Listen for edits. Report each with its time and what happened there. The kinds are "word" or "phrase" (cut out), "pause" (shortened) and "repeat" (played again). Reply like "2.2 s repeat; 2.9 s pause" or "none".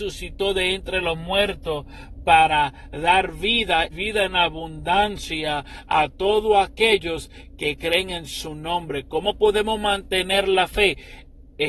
3.9 s word